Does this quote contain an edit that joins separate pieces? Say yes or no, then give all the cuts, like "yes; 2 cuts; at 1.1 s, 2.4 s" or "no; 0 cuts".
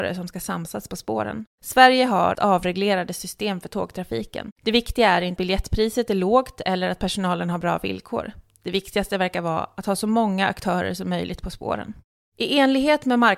yes; 5 cuts; at 1.5 s, 2.3 s, 4.5 s, 5.4 s, 12.2 s